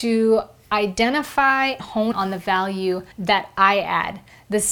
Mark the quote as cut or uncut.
cut